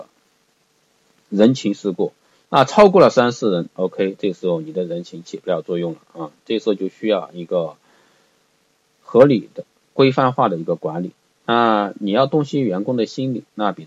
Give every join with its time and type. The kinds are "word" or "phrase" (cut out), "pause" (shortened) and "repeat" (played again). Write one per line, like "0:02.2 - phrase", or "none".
none

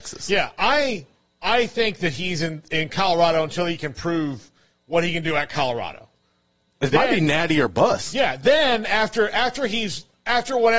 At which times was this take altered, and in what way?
none

